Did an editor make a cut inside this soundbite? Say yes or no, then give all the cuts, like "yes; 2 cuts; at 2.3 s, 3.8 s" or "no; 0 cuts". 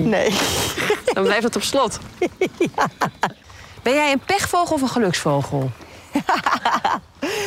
no; 0 cuts